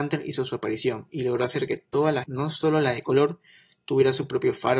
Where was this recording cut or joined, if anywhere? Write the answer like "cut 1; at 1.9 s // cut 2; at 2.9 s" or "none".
cut 1; at 2.2 s